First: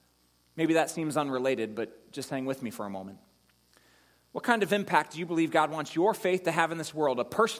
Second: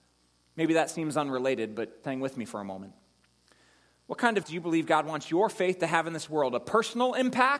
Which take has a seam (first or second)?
second